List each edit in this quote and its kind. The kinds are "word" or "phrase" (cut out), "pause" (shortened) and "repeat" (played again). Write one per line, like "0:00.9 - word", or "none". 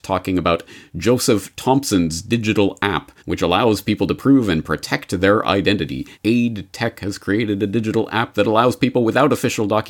0:03.2 - pause
0:06.1 - pause